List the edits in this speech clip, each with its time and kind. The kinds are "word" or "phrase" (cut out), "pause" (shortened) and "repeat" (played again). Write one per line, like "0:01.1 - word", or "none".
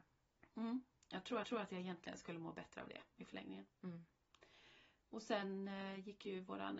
0:01.4 - repeat